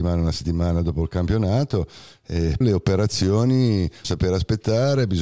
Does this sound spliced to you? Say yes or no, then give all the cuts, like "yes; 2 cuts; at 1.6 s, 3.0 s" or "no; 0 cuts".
yes; 2 cuts; at 2.6 s, 4.0 s